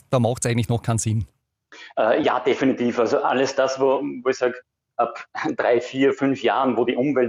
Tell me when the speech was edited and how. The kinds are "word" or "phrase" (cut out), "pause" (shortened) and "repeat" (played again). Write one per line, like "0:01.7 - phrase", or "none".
none